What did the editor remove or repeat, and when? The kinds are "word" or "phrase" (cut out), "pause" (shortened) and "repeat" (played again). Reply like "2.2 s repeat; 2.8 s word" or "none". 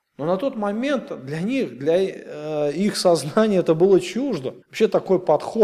4.6 s pause